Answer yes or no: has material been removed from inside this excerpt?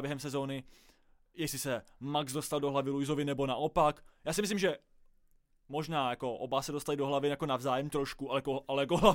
no